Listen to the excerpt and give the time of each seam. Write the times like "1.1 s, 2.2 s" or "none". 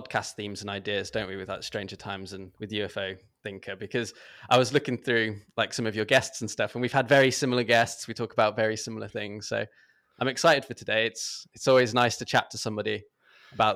2.6 s